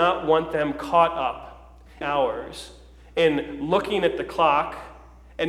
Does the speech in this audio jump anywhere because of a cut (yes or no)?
yes